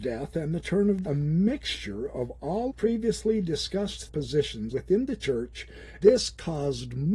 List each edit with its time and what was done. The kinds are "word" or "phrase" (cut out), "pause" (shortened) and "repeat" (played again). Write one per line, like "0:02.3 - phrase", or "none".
0:01.0 - phrase
0:02.7 - phrase
0:04.1 - word
0:04.7 - word
0:06.0 - word